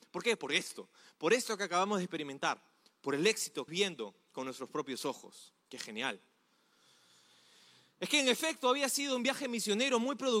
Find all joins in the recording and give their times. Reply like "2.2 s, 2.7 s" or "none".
3.7 s, 5.6 s